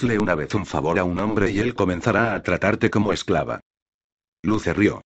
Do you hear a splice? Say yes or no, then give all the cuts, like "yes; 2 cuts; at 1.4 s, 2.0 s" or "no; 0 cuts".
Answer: no; 0 cuts